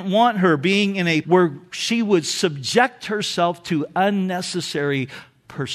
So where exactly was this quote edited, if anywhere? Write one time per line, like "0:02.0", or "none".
0:01.2